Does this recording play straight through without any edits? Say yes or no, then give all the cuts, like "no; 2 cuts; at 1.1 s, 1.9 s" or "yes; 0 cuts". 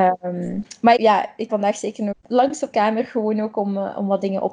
no; 4 cuts; at 1.0 s, 1.5 s, 2.1 s, 2.7 s